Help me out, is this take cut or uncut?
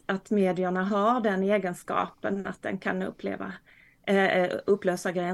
uncut